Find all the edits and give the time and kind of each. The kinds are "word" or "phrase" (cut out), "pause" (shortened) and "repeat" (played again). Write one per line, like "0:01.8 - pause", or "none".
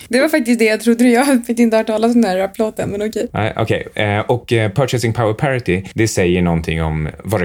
none